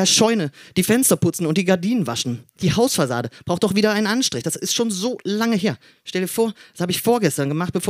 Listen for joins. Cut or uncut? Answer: uncut